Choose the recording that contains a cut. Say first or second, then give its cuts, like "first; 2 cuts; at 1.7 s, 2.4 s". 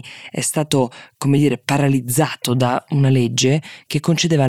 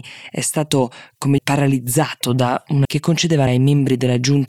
second; 3 cuts; at 1.4 s, 2.8 s, 3.5 s